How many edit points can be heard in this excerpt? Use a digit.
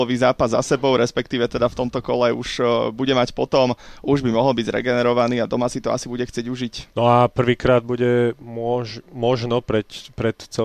1